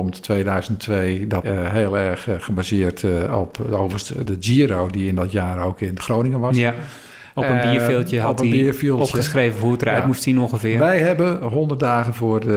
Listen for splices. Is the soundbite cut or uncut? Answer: cut